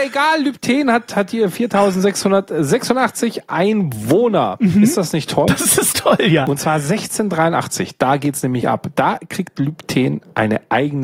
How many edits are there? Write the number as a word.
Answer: one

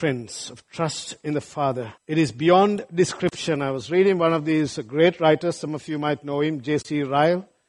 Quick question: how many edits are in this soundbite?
one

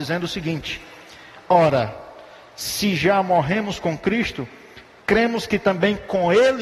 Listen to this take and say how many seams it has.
zero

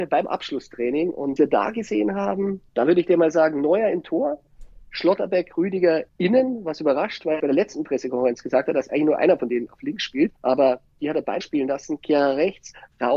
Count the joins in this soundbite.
five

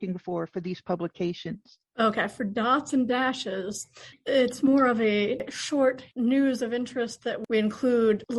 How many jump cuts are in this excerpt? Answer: one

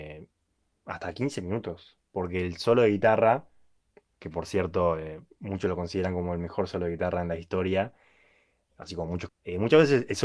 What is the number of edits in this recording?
one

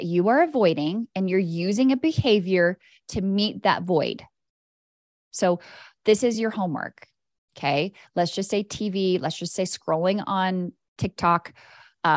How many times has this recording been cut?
zero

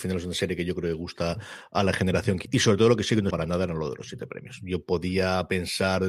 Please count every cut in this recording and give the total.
two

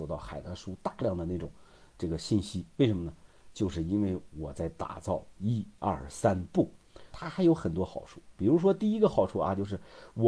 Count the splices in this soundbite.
one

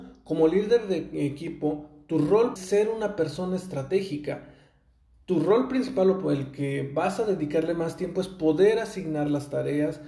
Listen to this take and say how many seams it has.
one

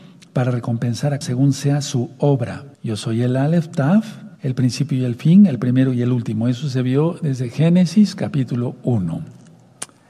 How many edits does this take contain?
three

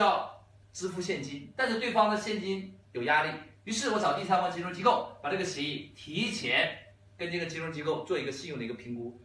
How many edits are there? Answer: zero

